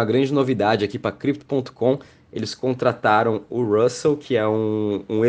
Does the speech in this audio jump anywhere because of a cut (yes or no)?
no